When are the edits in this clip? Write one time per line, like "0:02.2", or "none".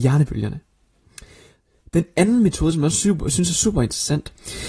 none